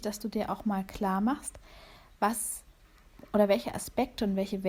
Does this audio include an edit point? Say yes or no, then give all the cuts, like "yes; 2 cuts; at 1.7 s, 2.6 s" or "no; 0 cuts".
no; 0 cuts